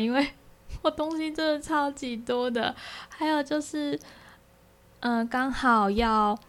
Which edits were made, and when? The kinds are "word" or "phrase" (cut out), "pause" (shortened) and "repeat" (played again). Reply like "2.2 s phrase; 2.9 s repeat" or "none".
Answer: none